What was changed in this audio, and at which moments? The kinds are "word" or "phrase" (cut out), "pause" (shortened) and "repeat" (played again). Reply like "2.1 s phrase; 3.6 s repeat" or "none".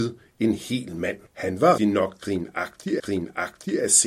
1.3 s pause; 1.8 s word; 3.0 s repeat